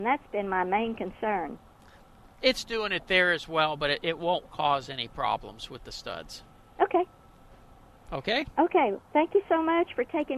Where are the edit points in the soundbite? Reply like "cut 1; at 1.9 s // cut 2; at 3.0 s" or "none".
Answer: none

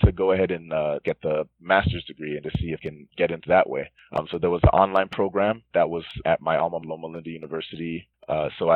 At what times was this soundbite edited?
cut 1; at 1.0 s // cut 2; at 2.4 s // cut 3; at 2.8 s // cut 4; at 3.1 s // cut 5; at 3.4 s // cut 6; at 5.7 s // cut 7; at 6.2 s // cut 8; at 6.8 s

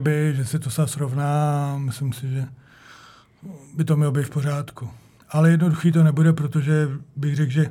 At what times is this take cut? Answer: none

